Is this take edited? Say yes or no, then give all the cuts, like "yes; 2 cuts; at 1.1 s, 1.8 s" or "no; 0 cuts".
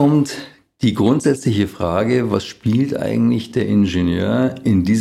no; 0 cuts